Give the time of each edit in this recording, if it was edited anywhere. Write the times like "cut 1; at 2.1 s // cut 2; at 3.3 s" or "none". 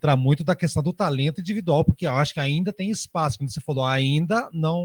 none